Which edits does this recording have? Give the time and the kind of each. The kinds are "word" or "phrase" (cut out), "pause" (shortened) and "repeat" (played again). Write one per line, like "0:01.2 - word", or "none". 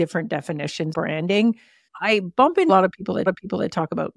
0:00.9 - word
0:02.7 - word
0:03.3 - repeat